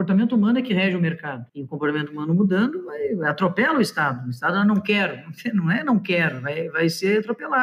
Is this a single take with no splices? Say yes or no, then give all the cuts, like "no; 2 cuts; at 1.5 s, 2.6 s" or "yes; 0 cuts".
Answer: no; 1 cut; at 1.5 s